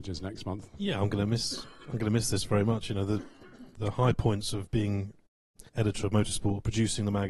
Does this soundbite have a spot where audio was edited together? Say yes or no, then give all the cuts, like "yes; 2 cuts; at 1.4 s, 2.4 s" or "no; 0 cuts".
yes; 2 cuts; at 3.8 s, 5.7 s